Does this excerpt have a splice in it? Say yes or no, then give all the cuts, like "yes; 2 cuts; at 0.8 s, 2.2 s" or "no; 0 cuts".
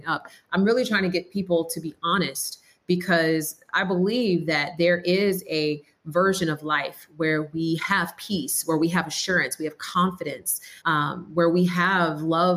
yes; 1 cut; at 10.8 s